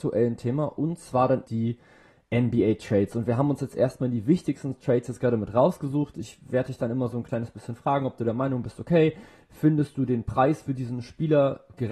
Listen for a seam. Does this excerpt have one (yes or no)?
yes